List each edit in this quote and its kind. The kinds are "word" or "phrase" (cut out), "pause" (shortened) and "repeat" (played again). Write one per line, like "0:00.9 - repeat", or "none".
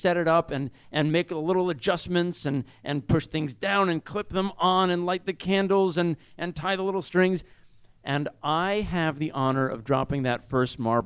none